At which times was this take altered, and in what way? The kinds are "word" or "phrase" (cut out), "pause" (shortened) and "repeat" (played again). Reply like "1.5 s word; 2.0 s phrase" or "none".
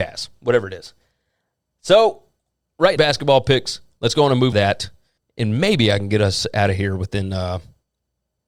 3.0 s phrase; 4.5 s word; 5.2 s pause